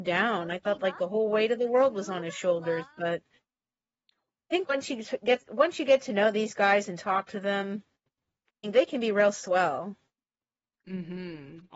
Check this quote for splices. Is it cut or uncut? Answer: uncut